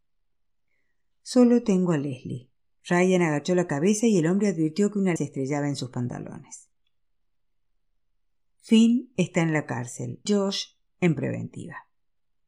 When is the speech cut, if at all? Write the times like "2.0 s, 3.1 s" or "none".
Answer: 5.2 s, 10.3 s, 11.2 s